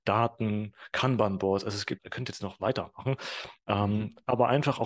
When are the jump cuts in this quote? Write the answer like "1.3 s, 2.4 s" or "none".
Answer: 2.0 s

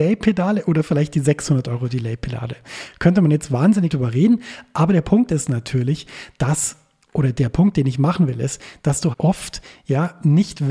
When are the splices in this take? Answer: 3.9 s, 9.1 s

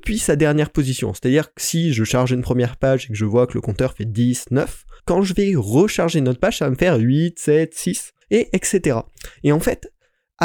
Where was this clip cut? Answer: 5.0 s, 8.2 s

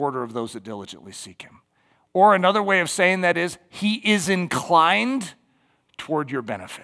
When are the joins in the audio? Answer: none

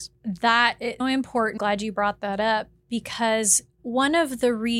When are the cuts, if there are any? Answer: 1.0 s, 1.6 s

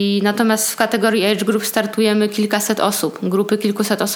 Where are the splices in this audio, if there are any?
none

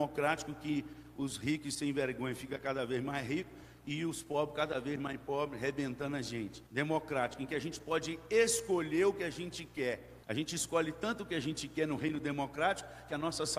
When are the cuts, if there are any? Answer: 6.7 s, 10.2 s

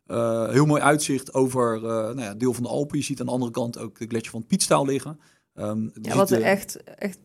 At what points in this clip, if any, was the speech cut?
none

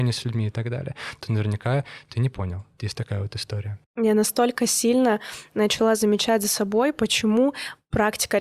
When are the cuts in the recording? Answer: 2.7 s

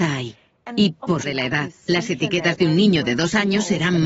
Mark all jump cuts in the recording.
1.2 s

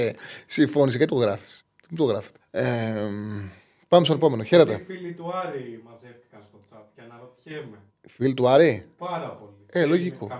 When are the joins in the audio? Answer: 1.1 s, 1.6 s, 2.4 s, 7.9 s

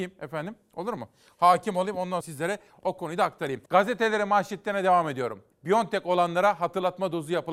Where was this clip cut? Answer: 2.2 s, 3.7 s, 5.5 s

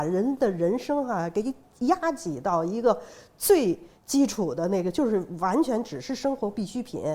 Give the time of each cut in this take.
4.0 s

